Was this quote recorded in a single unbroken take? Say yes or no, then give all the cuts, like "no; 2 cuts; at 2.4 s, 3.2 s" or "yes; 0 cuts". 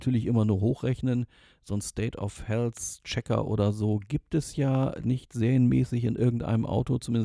yes; 0 cuts